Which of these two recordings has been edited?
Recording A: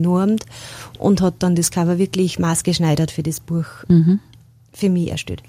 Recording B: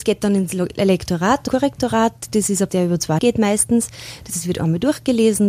B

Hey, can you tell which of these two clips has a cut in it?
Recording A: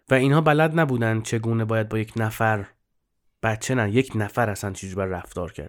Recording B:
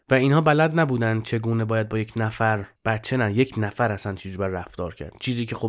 B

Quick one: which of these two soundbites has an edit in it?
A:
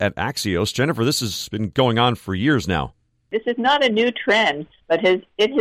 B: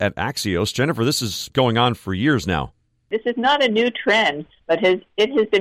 B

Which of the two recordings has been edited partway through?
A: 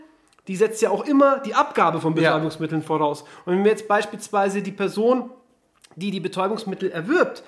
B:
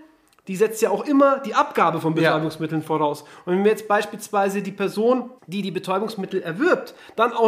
B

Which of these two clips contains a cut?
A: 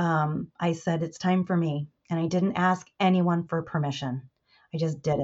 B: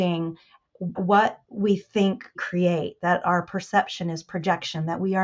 B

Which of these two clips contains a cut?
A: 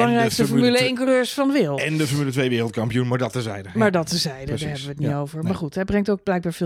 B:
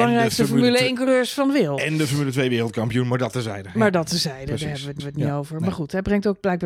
B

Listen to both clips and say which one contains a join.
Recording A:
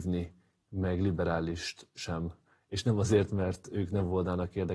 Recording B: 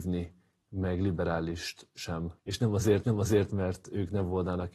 B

